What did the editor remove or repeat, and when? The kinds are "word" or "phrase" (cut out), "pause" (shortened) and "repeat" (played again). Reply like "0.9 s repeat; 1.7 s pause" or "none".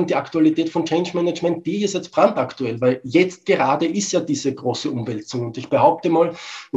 none